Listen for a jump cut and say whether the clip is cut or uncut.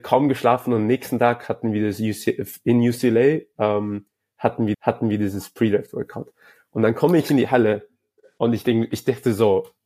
cut